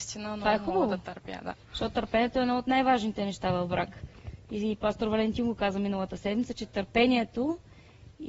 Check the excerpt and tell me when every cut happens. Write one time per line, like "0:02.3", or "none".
none